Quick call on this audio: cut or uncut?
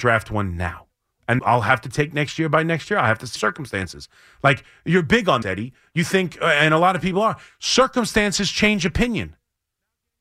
cut